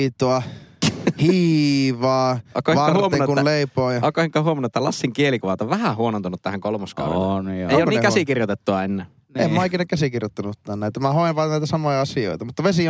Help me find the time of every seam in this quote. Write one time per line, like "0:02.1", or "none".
none